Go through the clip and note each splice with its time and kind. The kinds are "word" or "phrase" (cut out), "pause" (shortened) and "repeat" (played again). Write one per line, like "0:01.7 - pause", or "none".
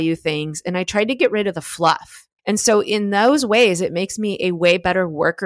0:02.4 - pause